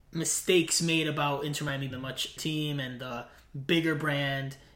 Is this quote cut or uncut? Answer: cut